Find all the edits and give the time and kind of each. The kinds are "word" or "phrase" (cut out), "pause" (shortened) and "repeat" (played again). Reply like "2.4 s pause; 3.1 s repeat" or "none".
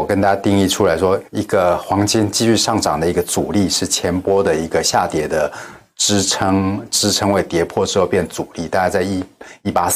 1.2 s pause